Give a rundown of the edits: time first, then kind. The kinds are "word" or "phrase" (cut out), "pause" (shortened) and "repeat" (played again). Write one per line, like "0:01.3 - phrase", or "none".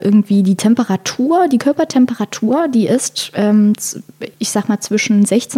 0:04.3 - pause

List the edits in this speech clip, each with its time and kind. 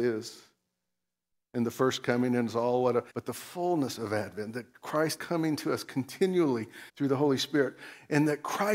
0:03.1 - pause
0:05.2 - word
0:06.9 - pause

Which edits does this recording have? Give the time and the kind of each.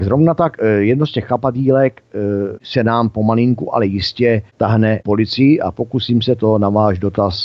none

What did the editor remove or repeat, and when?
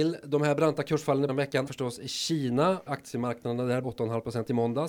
0:01.3 - word
0:01.7 - word
0:02.9 - word
0:03.8 - word

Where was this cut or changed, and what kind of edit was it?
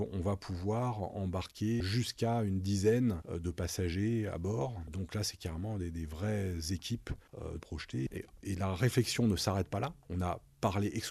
0:07.6 - phrase
0:08.2 - word

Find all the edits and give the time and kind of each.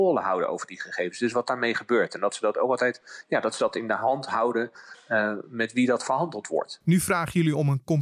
none

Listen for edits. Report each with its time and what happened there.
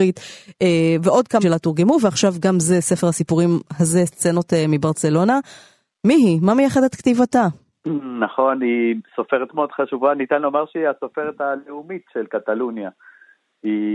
0:01.4 - word
0:09.5 - word

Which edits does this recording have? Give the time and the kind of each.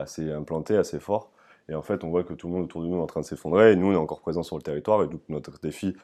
none

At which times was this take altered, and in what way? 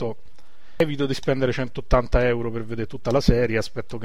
none

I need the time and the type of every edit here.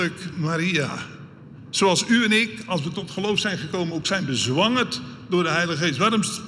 none

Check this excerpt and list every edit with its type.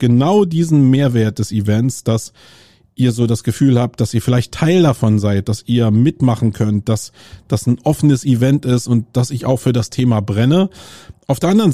none

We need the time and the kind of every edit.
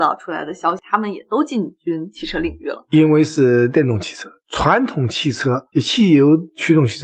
0:05.7 - pause

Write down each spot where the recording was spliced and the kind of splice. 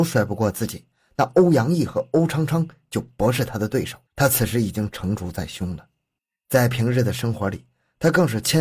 0:04.1 - pause
0:06.2 - pause

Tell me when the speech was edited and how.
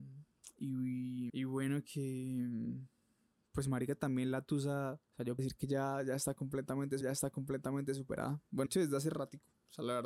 0:01.3 - word
0:05.0 - pause
0:05.4 - word
0:07.0 - repeat
0:08.7 - word

